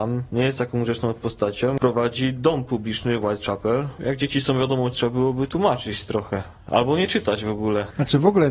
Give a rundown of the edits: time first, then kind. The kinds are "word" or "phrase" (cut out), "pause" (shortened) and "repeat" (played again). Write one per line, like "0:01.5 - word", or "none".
0:04.9 - word